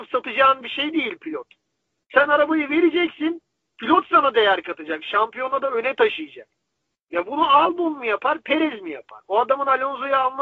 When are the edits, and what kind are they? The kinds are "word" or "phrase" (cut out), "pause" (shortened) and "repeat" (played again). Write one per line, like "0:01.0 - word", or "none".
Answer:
none